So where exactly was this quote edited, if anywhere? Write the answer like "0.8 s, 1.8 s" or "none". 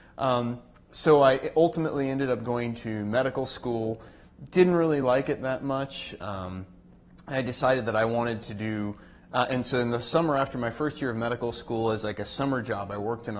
none